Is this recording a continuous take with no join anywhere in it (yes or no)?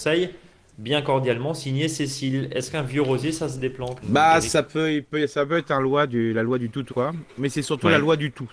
no